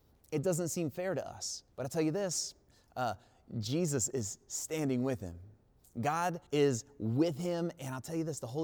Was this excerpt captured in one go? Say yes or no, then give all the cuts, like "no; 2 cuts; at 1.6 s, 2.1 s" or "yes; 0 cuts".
no; 3 cuts; at 1.7 s, 2.7 s, 6.5 s